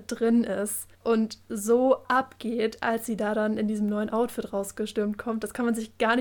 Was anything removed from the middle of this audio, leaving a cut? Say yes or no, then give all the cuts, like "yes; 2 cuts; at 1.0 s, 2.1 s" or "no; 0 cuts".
yes; 1 cut; at 0.9 s